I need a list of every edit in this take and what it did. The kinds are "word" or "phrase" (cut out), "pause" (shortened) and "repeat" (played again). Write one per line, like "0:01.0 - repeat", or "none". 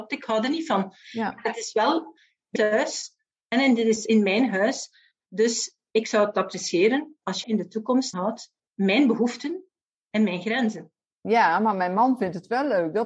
0:02.6 - word
0:07.4 - word
0:08.1 - word
0:08.6 - word